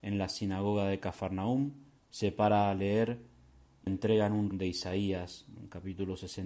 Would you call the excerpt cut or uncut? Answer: cut